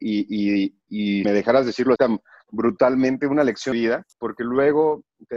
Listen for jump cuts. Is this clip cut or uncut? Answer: cut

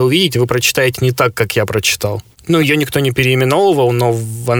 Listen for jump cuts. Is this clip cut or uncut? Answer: uncut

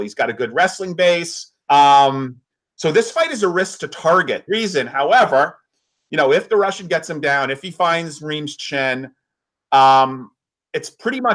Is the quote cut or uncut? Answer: cut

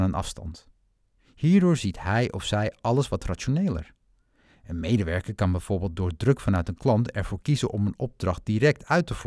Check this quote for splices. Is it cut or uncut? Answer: uncut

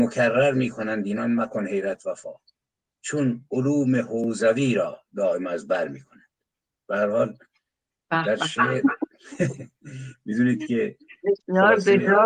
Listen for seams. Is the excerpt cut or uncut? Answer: uncut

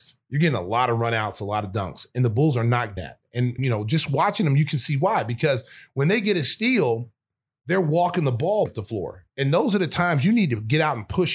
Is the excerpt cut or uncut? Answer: cut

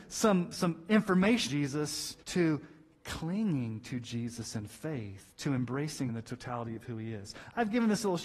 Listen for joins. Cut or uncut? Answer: cut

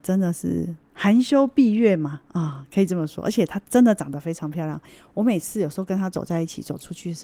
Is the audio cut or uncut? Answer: uncut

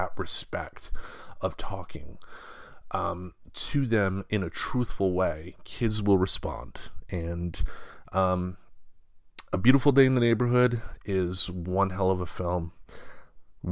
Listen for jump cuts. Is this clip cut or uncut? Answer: uncut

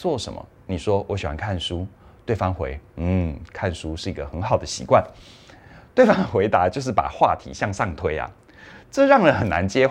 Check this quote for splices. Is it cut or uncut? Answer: uncut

